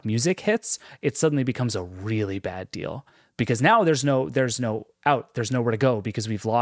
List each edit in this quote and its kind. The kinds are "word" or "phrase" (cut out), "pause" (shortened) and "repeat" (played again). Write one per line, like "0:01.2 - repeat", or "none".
none